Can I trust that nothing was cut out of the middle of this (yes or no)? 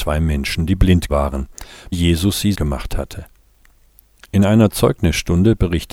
no